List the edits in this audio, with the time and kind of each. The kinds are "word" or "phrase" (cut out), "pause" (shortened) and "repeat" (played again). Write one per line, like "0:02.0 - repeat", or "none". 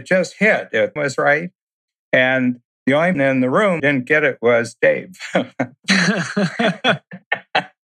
0:01.0 - word
0:03.1 - word
0:03.8 - word